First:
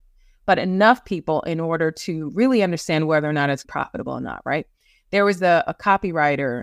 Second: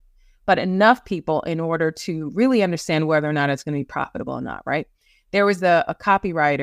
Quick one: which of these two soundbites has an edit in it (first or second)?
first